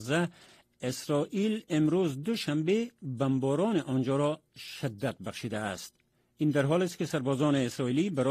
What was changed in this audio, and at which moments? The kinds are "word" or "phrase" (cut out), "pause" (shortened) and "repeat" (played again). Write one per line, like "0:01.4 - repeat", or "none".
none